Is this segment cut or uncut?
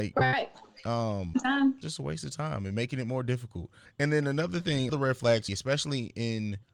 cut